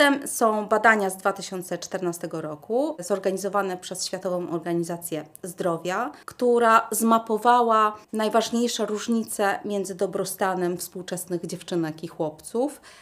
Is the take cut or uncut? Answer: cut